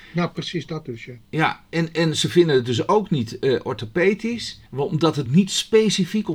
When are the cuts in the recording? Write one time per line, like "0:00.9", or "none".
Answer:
0:04.7
0:05.3